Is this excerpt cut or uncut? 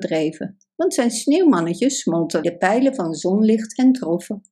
cut